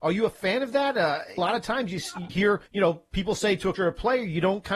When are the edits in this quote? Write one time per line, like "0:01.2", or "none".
0:01.4
0:02.3
0:02.7
0:03.8